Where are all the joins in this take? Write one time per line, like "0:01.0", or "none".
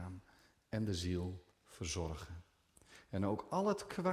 0:01.5